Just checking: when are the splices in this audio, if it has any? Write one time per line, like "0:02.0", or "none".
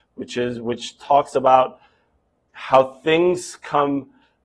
none